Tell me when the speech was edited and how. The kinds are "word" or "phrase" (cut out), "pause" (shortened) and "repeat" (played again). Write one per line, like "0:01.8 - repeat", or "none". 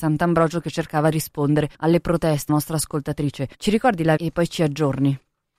0:01.1 - word
0:01.7 - pause
0:02.5 - phrase
0:03.5 - pause
0:04.2 - word

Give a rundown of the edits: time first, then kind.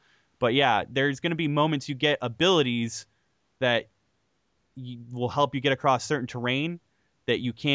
none

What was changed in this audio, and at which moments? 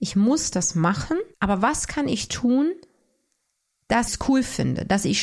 0:01.3 - pause
0:02.3 - word
0:04.1 - word

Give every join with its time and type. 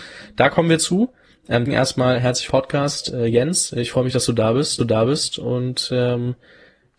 0:01.7 - word
0:02.5 - phrase
0:04.8 - repeat

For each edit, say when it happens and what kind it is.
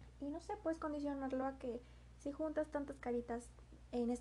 none

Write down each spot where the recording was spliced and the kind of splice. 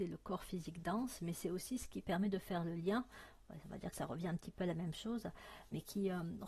none

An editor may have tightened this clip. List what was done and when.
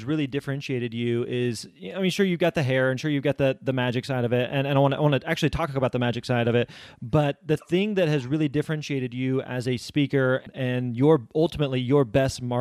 none

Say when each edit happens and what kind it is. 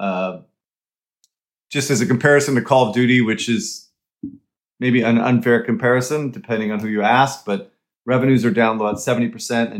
none

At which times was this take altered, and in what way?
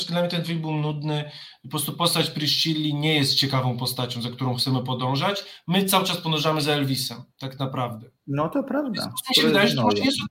0:07.3 - pause
0:08.1 - pause

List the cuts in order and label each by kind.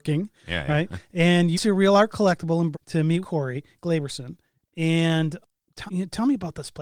0:01.5 - word
0:02.7 - word
0:03.2 - word
0:05.9 - word

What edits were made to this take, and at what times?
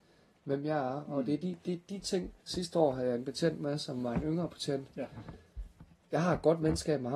0:02.4 - pause

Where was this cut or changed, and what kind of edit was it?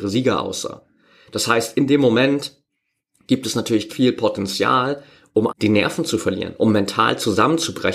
0:03.9 - word
0:05.5 - word

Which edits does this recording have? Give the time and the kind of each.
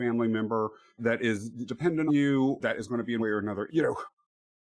0:01.0 - word
0:01.7 - word
0:02.1 - word
0:02.6 - word
0:03.2 - word
0:03.7 - word

